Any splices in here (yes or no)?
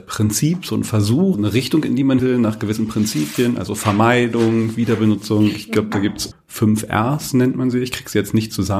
yes